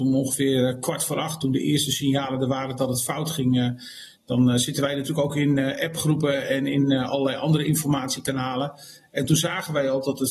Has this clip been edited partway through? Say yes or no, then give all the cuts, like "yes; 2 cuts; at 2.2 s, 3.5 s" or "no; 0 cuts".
no; 0 cuts